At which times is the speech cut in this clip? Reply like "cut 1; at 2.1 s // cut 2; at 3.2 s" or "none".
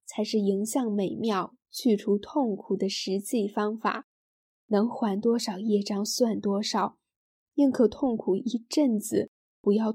none